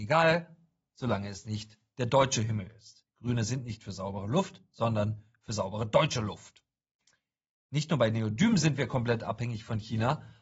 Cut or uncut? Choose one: uncut